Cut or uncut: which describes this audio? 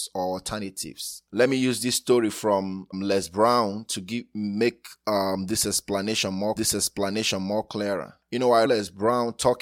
cut